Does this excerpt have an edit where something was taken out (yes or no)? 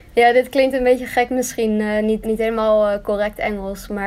yes